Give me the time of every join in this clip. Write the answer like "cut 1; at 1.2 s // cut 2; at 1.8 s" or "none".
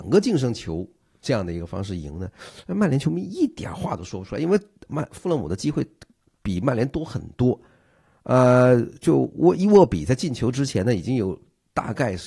none